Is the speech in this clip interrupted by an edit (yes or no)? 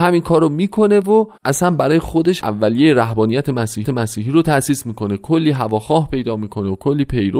yes